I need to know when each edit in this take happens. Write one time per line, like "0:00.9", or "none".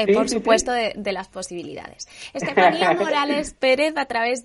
none